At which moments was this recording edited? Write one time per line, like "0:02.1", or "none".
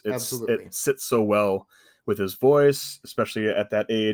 none